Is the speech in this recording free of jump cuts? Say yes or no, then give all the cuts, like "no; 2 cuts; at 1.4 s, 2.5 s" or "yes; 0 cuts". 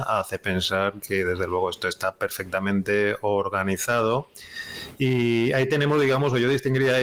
yes; 0 cuts